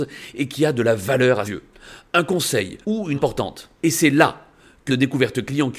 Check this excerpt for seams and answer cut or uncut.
cut